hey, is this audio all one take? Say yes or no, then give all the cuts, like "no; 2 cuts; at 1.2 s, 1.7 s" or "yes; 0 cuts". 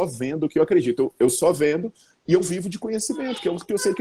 yes; 0 cuts